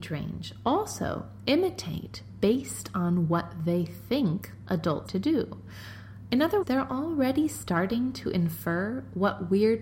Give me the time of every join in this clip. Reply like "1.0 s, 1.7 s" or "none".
5.1 s, 6.6 s